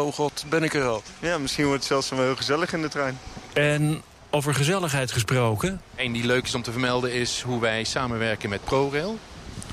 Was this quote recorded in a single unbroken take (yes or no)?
yes